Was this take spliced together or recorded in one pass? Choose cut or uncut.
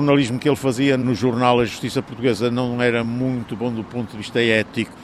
uncut